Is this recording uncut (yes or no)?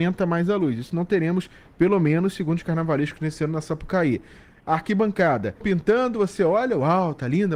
no